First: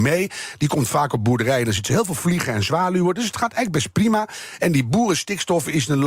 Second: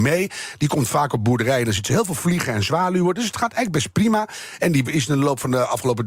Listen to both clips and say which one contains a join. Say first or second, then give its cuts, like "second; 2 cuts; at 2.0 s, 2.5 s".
second; 1 cut; at 4.8 s